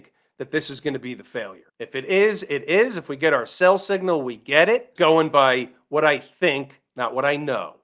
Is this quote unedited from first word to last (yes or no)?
no